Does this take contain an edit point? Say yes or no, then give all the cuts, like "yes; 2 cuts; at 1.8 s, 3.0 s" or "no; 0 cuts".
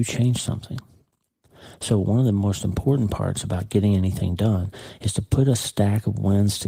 no; 0 cuts